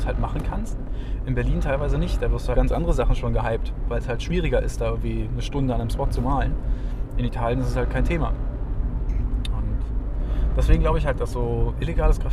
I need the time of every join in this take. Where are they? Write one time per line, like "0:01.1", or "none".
0:02.5